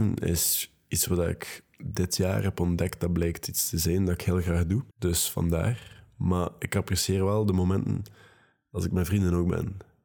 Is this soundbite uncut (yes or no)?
no